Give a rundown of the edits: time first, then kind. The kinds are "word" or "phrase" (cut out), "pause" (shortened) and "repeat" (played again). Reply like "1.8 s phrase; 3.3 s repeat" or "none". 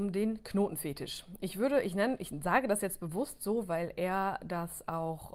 none